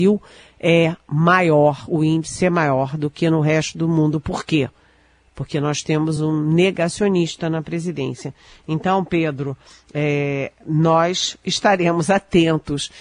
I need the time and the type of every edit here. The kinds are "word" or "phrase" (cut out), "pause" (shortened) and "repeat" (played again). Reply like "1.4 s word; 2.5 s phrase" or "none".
none